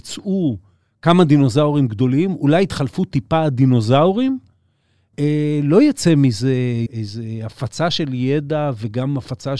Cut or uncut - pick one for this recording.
cut